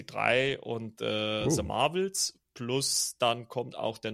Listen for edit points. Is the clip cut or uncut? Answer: uncut